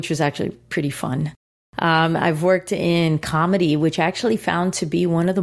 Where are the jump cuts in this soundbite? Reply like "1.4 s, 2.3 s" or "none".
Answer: none